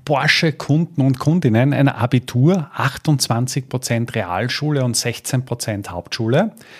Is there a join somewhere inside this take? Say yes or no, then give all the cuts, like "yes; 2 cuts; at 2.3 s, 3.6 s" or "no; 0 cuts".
no; 0 cuts